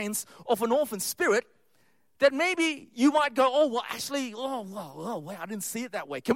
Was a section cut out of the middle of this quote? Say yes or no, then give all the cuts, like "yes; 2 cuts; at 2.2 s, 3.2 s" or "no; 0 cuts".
no; 0 cuts